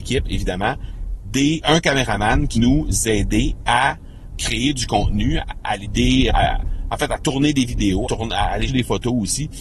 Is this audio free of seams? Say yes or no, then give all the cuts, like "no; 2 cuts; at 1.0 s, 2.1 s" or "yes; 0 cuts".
no; 8 cuts; at 1.6 s, 2.5 s, 4.3 s, 5.4 s, 5.8 s, 6.3 s, 8.0 s, 8.7 s